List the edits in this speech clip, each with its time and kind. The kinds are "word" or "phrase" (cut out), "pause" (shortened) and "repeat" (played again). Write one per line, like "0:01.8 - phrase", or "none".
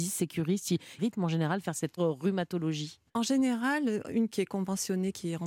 0:01.0 - phrase
0:02.0 - word
0:03.1 - pause
0:04.3 - word